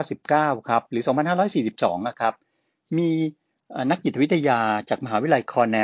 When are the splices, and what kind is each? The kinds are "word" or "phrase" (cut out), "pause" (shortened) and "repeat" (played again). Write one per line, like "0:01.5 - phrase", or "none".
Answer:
none